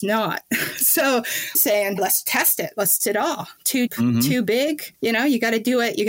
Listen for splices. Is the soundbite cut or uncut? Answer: cut